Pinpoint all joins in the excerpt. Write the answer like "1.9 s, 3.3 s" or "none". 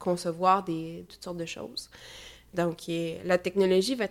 1.1 s